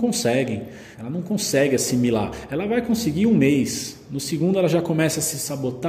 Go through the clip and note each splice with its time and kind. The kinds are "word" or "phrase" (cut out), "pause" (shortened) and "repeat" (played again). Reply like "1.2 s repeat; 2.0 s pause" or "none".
0.9 s pause